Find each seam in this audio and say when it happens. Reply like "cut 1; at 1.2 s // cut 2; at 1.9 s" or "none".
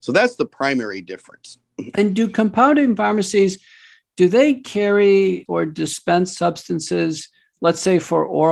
cut 1; at 5.5 s

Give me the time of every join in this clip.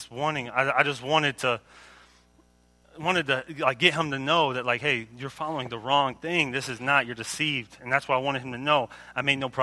none

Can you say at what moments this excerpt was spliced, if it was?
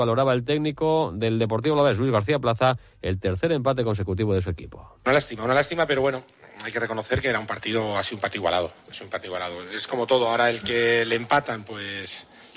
none

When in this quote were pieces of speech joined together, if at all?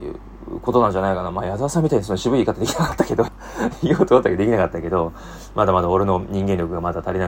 cut 1; at 3.3 s

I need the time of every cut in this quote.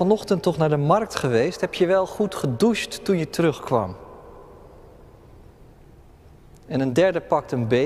none

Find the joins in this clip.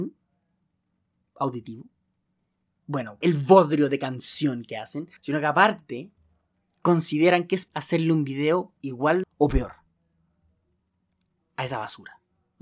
cut 1; at 3.2 s // cut 2; at 5.2 s // cut 3; at 7.7 s // cut 4; at 8.8 s // cut 5; at 9.2 s

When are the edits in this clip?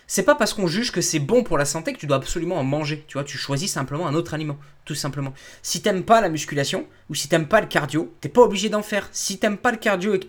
cut 1; at 8.2 s

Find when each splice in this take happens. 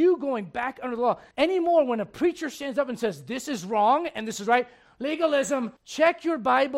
cut 1; at 1.3 s // cut 2; at 5.8 s

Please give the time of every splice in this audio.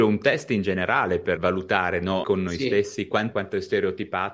cut 1; at 1.4 s // cut 2; at 2.2 s // cut 3; at 3.3 s

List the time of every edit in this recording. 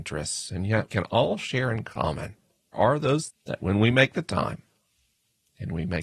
cut 1; at 0.9 s // cut 2; at 2.7 s // cut 3; at 3.3 s

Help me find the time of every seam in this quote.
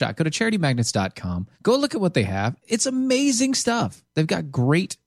cut 1; at 1.5 s

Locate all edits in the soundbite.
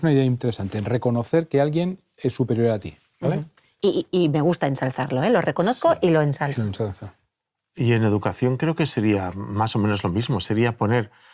none

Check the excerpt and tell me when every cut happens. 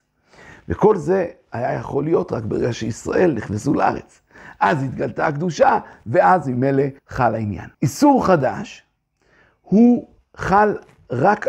cut 1; at 7.0 s // cut 2; at 7.7 s // cut 3; at 10.2 s

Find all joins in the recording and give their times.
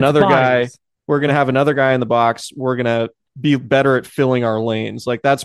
none

